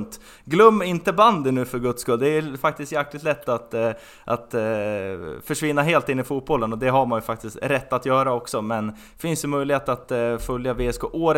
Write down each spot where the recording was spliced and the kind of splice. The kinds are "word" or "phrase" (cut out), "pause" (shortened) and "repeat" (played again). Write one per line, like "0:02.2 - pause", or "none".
none